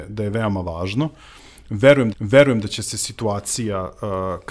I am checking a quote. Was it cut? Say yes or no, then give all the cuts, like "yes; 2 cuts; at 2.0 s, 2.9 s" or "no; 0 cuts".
yes; 1 cut; at 2.1 s